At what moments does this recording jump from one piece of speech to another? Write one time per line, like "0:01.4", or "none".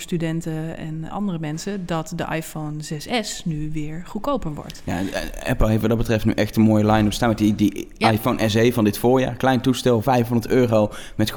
0:01.1